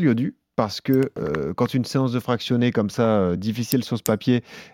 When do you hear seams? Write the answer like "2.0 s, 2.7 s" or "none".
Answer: none